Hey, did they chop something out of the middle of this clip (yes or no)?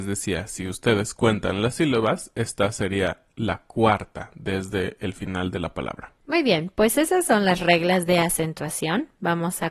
yes